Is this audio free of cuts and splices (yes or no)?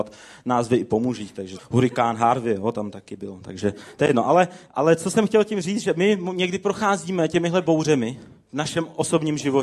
no